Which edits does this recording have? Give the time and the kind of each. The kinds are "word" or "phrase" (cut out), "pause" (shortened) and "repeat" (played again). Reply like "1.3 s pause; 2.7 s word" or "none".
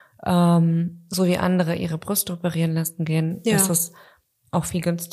none